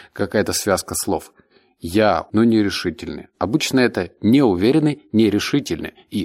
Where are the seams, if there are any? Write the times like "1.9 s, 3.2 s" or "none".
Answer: 2.3 s

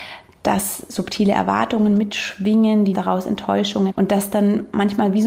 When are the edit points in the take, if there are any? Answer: 2.9 s, 3.9 s

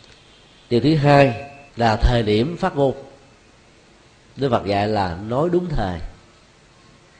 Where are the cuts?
1.7 s

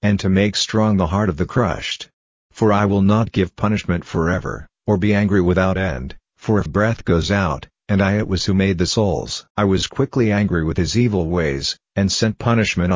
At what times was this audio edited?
6.7 s

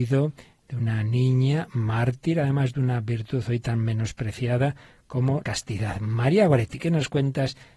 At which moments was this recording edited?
5.4 s

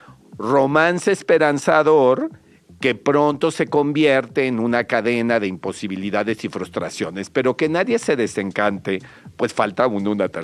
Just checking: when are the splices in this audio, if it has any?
none

